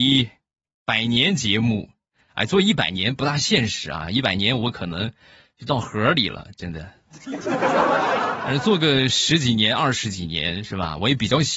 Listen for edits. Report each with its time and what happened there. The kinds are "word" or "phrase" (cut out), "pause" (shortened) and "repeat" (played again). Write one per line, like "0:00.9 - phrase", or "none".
none